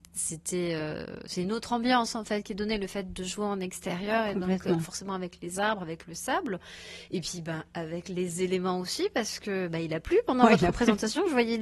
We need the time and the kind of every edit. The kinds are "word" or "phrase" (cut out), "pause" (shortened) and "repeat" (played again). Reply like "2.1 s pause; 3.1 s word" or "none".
none